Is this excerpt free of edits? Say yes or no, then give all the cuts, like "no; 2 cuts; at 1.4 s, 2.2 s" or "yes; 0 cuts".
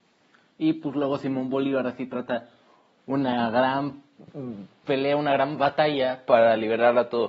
yes; 0 cuts